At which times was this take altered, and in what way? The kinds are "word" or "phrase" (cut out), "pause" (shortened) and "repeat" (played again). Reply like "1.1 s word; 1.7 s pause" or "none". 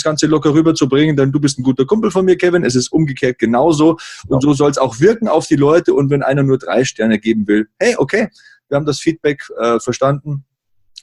none